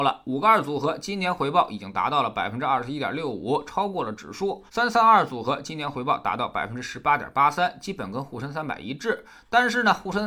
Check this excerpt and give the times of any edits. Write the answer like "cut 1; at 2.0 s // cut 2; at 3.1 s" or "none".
cut 1; at 4.7 s